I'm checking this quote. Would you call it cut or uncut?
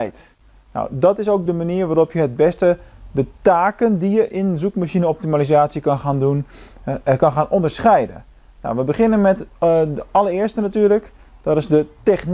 uncut